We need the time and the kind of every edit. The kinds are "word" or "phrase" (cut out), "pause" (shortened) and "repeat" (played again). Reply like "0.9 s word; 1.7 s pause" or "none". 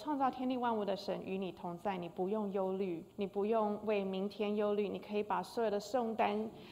3.1 s pause